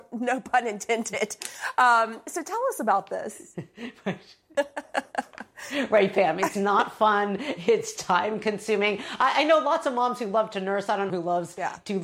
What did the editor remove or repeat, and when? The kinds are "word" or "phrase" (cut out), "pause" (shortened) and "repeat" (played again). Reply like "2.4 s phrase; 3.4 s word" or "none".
11.1 s phrase